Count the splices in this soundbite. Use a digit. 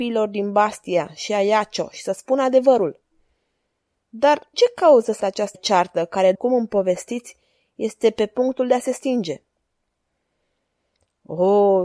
4